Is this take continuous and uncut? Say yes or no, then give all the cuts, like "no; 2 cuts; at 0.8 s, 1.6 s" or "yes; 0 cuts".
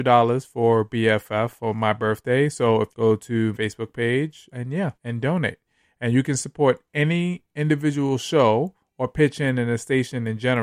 no; 4 cuts; at 2.9 s, 3.5 s, 4.5 s, 5.0 s